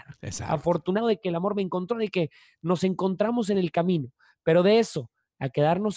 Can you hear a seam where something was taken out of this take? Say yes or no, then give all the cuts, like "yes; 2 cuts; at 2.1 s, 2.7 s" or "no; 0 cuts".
no; 0 cuts